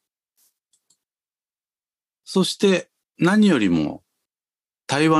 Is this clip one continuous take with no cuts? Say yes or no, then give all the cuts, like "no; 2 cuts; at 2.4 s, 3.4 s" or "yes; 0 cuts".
yes; 0 cuts